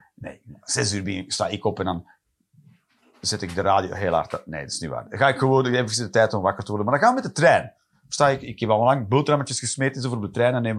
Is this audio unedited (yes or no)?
yes